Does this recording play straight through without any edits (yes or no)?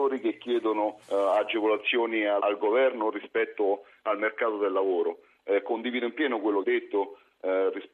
no